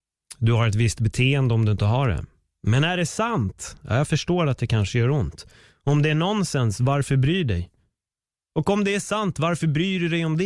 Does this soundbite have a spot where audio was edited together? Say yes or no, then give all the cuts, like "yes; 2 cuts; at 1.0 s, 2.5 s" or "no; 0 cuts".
no; 0 cuts